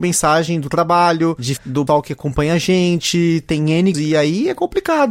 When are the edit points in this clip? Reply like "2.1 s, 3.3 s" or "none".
1.6 s, 1.9 s, 3.9 s